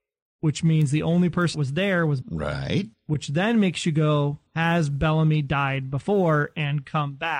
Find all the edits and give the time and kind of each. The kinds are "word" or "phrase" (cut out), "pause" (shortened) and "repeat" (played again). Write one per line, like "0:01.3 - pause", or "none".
0:01.5 - word
0:02.2 - word
0:02.9 - pause
0:04.5 - pause